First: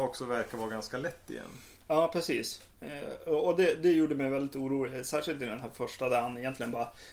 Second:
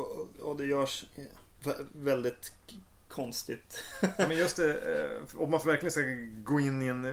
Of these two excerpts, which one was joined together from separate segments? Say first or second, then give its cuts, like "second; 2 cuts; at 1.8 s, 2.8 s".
first; 1 cut; at 2.7 s